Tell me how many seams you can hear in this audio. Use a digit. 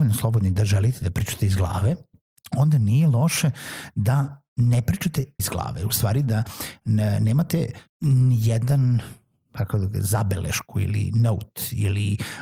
2